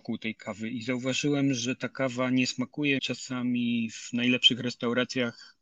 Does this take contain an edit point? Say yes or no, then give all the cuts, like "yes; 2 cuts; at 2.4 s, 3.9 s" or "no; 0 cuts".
yes; 1 cut; at 3.0 s